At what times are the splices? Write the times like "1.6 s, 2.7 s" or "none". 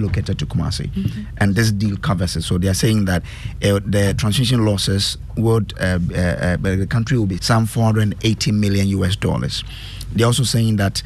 7.4 s